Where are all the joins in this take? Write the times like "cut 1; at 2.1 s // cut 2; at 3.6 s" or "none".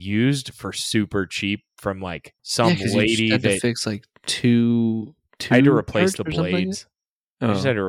cut 1; at 2.4 s